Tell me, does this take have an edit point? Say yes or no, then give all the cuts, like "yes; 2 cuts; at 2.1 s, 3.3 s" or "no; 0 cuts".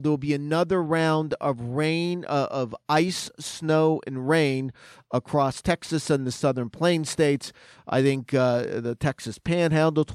no; 0 cuts